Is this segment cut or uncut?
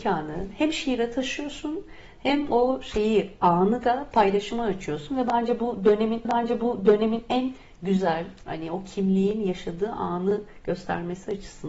cut